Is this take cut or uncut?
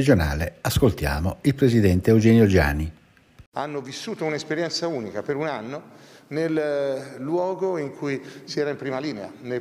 uncut